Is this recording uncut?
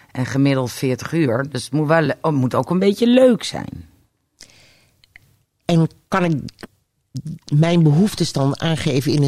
yes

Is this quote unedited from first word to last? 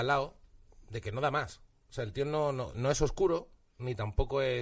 no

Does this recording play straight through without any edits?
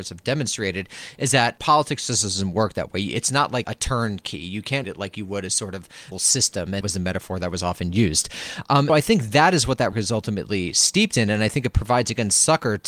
no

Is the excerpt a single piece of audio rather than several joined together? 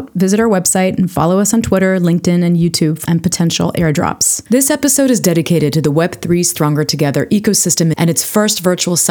no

